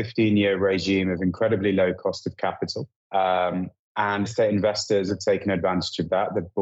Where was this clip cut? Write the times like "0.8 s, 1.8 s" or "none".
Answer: 3.0 s, 4.2 s, 5.1 s